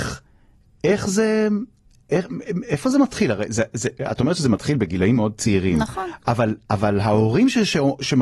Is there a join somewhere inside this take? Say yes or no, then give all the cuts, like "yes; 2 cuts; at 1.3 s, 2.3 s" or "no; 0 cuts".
no; 0 cuts